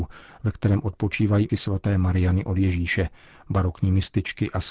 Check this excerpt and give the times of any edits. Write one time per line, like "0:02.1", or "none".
0:01.5